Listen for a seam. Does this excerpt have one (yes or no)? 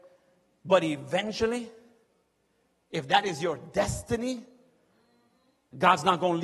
no